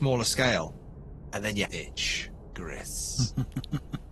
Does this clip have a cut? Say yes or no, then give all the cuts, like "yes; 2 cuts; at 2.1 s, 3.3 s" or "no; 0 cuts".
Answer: yes; 1 cut; at 1.6 s